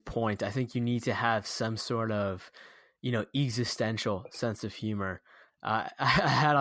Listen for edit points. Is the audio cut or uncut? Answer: uncut